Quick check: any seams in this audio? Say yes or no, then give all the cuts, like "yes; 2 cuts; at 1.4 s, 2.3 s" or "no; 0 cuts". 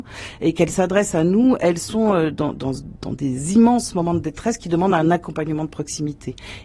no; 0 cuts